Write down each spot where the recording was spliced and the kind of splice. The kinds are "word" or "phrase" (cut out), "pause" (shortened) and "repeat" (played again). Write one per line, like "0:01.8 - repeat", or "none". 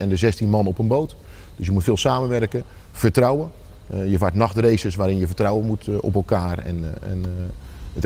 none